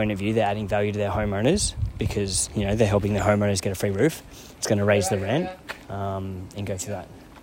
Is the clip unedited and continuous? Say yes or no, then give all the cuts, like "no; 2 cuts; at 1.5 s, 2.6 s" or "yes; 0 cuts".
no; 1 cut; at 5.8 s